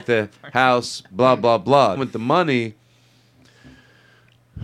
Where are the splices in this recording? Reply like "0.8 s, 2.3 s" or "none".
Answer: 2.0 s